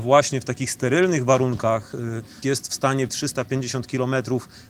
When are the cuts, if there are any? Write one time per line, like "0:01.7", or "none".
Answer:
0:02.4
0:03.1

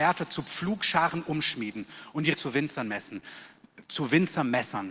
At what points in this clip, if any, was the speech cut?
0:02.3

